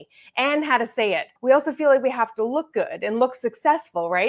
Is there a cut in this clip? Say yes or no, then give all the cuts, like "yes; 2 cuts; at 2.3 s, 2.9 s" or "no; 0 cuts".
yes; 1 cut; at 1.4 s